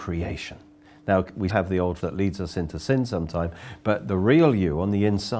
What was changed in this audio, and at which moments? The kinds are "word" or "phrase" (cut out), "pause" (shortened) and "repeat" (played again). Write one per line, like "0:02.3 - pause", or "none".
0:01.5 - word
0:02.0 - word